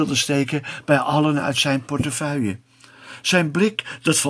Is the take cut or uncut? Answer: uncut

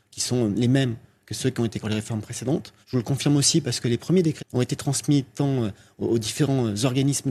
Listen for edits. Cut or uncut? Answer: cut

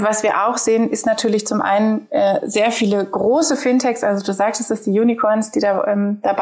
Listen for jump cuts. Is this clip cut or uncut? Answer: uncut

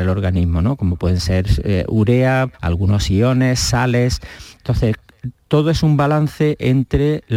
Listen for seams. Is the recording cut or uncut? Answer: cut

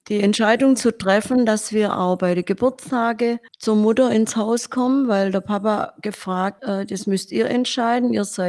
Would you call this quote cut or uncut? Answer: cut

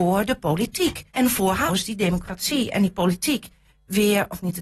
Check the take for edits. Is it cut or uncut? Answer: cut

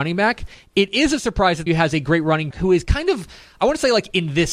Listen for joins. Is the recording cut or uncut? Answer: cut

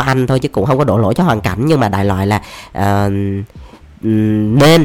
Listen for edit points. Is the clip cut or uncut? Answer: uncut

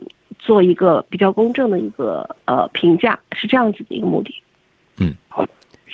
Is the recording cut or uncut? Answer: uncut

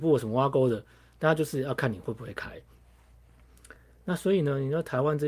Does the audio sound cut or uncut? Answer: uncut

